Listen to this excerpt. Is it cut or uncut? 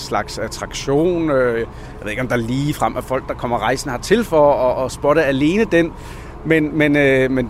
uncut